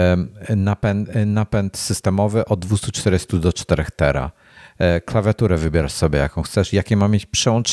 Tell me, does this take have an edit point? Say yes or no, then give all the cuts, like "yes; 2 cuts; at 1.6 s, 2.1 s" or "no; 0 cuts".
no; 0 cuts